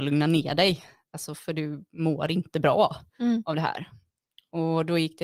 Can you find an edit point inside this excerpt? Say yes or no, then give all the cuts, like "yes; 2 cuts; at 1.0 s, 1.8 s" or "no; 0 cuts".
no; 0 cuts